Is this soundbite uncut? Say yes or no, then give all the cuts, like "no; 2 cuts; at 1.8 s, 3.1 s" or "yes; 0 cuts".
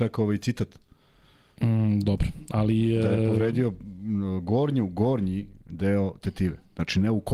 yes; 0 cuts